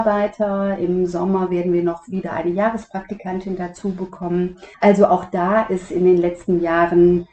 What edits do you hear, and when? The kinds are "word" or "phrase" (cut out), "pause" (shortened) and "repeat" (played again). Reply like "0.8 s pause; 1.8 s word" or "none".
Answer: 4.7 s pause

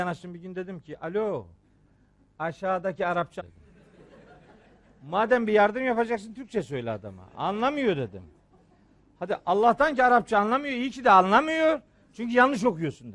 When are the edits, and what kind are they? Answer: 3.4 s word

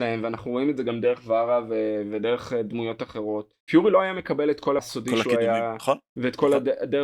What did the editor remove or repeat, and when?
3.6 s pause; 4.8 s word

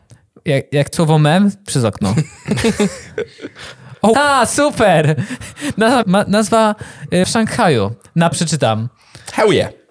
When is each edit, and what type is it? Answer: 0.9 s word; 1.7 s word; 4.1 s word; 6.0 s word; 7.2 s word; 8.3 s word

